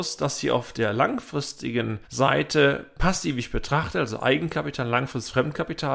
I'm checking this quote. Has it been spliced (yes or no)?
yes